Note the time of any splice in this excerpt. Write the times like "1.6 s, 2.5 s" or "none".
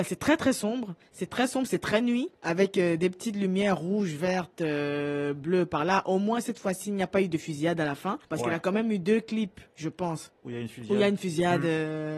2.3 s, 8.2 s, 10.3 s